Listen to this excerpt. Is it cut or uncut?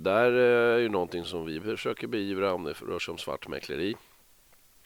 uncut